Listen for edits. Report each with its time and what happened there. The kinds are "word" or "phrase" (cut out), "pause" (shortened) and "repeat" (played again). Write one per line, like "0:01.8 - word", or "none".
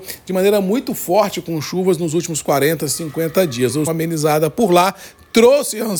0:03.9 - phrase